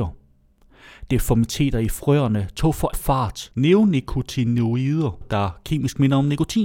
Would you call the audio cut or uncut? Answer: cut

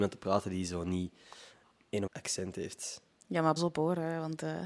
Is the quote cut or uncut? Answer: cut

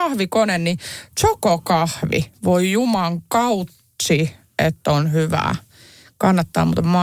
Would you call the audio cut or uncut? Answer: uncut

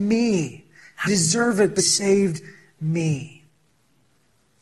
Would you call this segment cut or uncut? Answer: cut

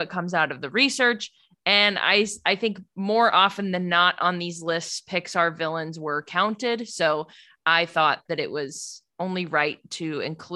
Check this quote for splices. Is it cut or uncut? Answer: uncut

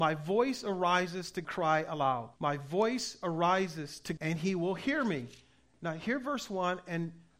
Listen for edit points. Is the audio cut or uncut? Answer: cut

